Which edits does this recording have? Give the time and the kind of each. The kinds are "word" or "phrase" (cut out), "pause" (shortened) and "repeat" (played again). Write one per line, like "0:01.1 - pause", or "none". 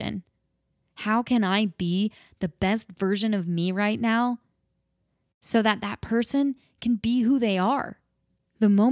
none